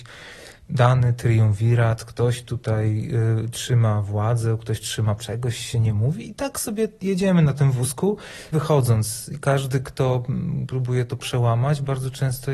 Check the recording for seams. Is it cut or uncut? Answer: cut